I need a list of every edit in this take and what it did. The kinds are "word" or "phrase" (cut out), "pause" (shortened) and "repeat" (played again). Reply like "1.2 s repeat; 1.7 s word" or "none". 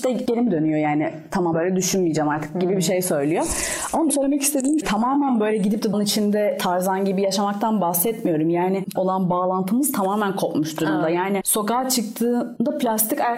1.5 s word; 4.1 s word; 4.8 s word; 5.9 s word; 9.0 s word